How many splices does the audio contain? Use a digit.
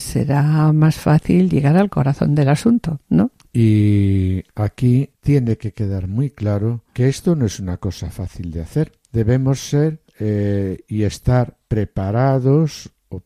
2